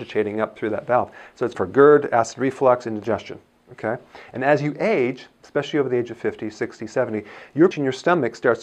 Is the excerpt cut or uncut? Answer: cut